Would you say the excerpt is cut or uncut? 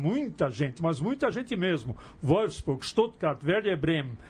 uncut